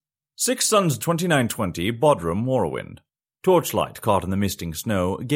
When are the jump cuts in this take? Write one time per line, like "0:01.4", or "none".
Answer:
0:01.0